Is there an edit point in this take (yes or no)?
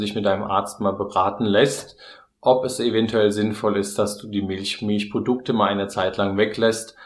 no